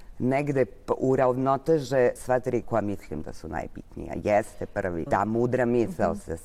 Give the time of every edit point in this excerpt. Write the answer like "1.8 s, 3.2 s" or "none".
2.2 s, 2.6 s, 5.1 s